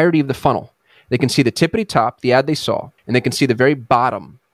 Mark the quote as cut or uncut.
cut